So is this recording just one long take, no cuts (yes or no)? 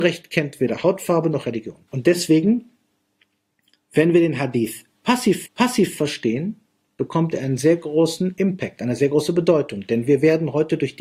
no